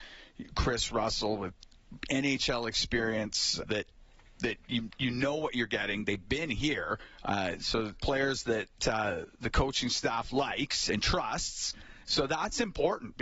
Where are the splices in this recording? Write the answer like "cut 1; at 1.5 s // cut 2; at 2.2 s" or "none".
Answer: cut 1; at 3.6 s // cut 2; at 8.0 s